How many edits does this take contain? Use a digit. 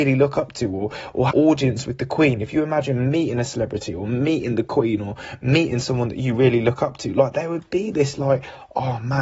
1